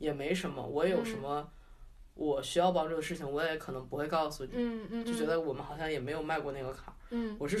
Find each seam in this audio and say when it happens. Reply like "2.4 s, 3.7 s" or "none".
5.0 s